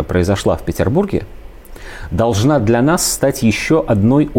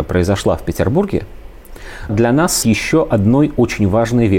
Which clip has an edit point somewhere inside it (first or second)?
second